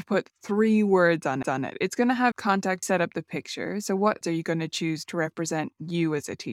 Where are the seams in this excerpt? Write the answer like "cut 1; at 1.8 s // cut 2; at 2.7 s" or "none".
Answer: cut 1; at 1.4 s // cut 2; at 2.3 s // cut 3; at 2.8 s // cut 4; at 4.2 s